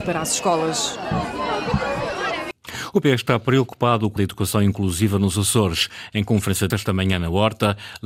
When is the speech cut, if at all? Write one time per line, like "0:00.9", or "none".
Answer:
0:03.0
0:04.2
0:06.7